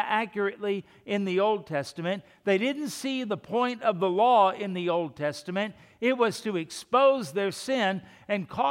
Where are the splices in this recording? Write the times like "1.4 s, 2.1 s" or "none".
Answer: none

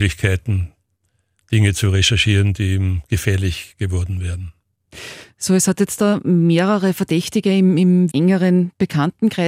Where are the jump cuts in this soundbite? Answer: 8.1 s

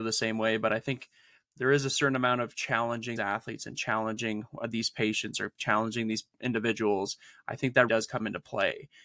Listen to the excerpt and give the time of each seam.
3.2 s, 7.9 s

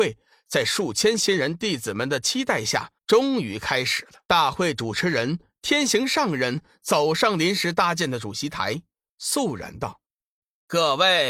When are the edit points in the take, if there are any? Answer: 3.0 s, 4.2 s

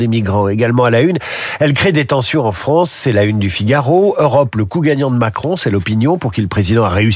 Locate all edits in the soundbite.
none

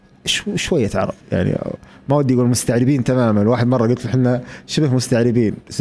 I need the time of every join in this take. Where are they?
1.2 s

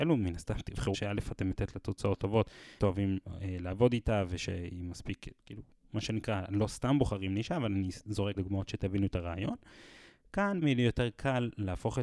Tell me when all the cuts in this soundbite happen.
0.9 s, 1.5 s, 2.8 s, 5.4 s, 8.4 s, 10.6 s

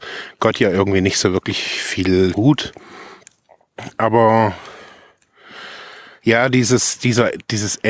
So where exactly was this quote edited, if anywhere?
2.3 s

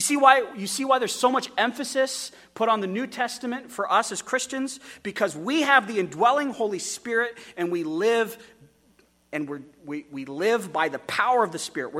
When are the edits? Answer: none

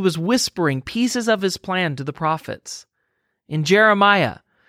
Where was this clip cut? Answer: none

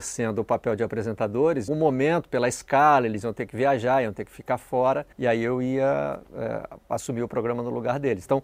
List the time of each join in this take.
1.7 s, 5.1 s

